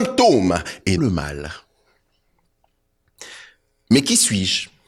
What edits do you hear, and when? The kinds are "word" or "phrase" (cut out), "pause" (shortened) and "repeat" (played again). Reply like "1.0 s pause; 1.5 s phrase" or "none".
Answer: 1.0 s word